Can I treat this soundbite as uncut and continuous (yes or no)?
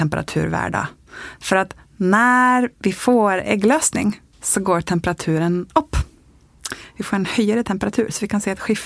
no